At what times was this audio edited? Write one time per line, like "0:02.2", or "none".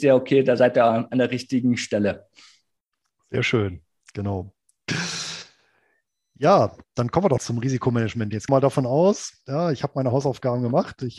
0:07.4
0:08.5